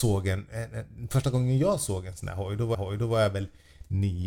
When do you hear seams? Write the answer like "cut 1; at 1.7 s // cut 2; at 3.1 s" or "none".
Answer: cut 1; at 2.7 s